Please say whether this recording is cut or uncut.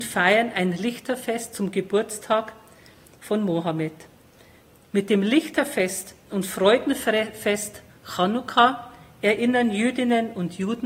uncut